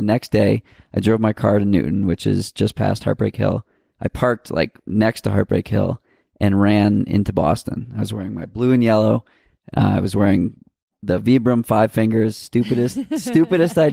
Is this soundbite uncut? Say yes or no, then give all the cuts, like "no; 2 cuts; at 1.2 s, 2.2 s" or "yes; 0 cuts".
yes; 0 cuts